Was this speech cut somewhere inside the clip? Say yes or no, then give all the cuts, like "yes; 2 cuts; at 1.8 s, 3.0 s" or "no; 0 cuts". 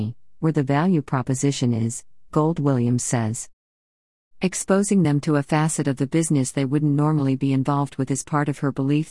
no; 0 cuts